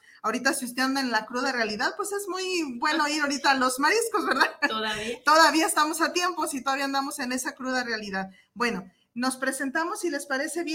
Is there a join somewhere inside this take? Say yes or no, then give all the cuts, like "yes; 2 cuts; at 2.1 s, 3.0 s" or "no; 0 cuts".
no; 0 cuts